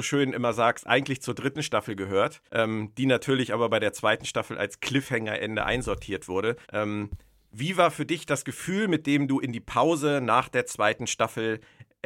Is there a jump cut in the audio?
yes; 2 cuts; at 2.5 s, 6.6 s

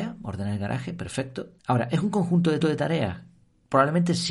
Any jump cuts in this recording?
yes; 2 cuts; at 1.6 s, 2.6 s

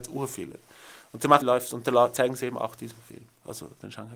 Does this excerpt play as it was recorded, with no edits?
no; 1 cut; at 1.4 s

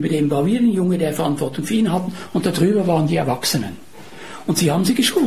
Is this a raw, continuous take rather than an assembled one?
yes; 0 cuts

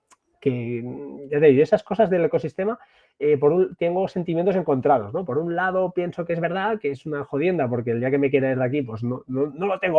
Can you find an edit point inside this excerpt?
no; 0 cuts

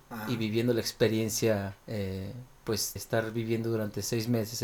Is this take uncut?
no; 2 cuts; at 1.8 s, 3.0 s

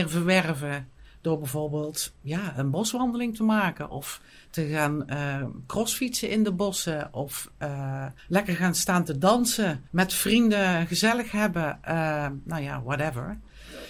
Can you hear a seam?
yes; 3 cuts; at 2.1 s, 8.2 s, 9.9 s

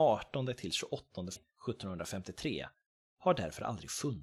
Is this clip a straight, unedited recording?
no; 1 cut; at 1.4 s

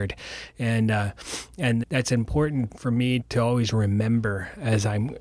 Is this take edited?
yes; 3 cuts; at 1.8 s, 2.7 s, 3.2 s

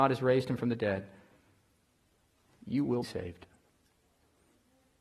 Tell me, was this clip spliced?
yes; 1 cut; at 3.0 s

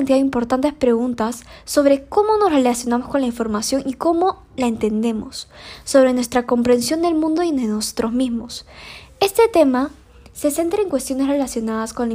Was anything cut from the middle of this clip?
no; 0 cuts

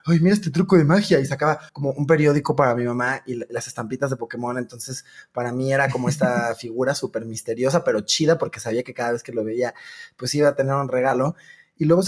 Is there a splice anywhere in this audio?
yes; 1 cut; at 1.7 s

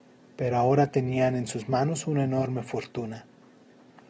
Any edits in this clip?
no; 0 cuts

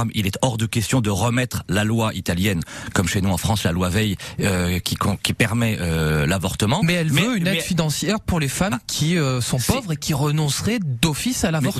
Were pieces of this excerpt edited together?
no; 0 cuts

